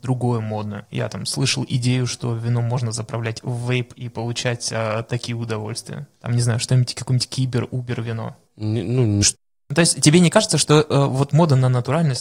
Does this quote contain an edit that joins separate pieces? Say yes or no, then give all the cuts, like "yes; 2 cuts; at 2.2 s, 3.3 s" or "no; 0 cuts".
yes; 1 cut; at 9.2 s